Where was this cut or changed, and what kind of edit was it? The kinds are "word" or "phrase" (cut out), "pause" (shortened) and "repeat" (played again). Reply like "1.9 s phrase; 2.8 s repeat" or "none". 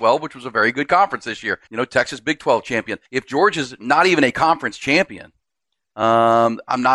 1.7 s pause; 3.0 s pause